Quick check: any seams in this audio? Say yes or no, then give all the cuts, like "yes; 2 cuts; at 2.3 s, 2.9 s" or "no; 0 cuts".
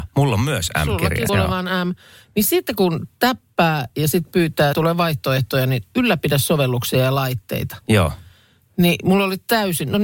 yes; 2 cuts; at 1.3 s, 4.7 s